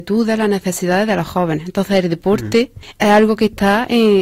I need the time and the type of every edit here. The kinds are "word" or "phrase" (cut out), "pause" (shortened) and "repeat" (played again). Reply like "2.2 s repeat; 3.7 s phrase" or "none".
none